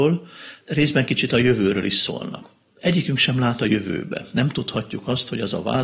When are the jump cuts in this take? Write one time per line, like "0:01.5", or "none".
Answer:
none